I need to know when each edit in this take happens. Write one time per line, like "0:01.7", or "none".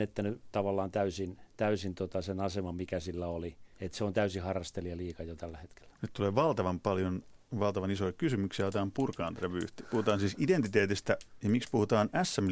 0:03.7